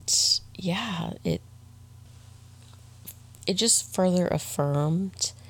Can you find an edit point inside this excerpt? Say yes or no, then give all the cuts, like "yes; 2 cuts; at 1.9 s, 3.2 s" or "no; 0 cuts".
no; 0 cuts